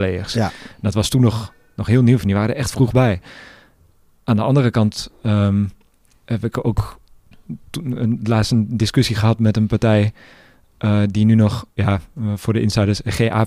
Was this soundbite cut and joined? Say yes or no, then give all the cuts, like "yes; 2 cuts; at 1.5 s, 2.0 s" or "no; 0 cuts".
yes; 1 cut; at 11.7 s